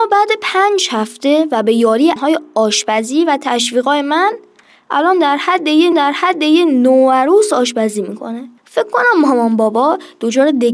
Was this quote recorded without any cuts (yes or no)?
no